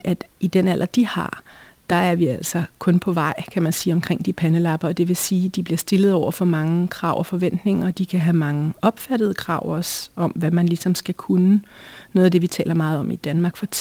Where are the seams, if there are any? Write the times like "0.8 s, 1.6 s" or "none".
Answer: none